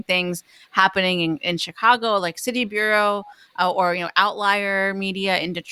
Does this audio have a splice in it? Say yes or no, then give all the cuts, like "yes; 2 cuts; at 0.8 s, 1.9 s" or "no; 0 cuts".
no; 0 cuts